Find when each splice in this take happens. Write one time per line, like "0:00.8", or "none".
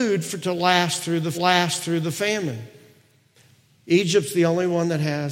0:01.3